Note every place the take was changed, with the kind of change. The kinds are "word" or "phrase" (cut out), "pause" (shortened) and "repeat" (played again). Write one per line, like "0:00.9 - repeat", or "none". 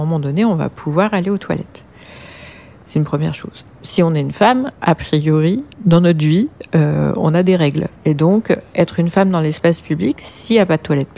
0:05.7 - pause
0:08.0 - pause